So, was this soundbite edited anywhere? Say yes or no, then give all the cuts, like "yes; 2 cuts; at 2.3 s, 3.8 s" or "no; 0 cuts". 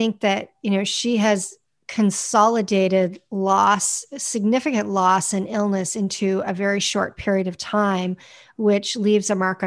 no; 0 cuts